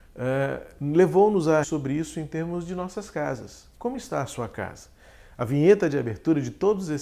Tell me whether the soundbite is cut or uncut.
cut